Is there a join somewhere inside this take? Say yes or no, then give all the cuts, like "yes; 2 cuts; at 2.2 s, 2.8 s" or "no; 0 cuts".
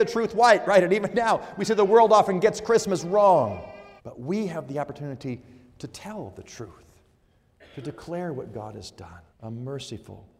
yes; 2 cuts; at 4.0 s, 9.3 s